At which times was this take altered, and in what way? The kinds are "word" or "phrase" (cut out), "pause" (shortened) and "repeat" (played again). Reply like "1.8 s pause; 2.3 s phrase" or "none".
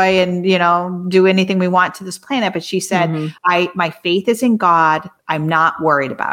3.4 s pause; 5.2 s pause